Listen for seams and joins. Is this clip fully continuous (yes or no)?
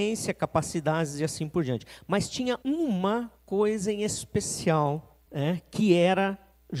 no